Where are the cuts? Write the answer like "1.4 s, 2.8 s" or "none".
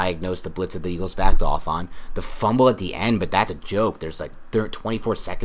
3.5 s